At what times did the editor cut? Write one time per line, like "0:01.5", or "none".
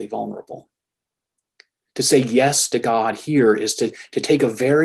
none